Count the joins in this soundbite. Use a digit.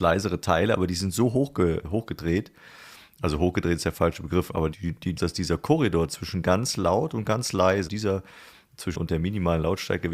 5